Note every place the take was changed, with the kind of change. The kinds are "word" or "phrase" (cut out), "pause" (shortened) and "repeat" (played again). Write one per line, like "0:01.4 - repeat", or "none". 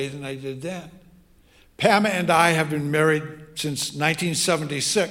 none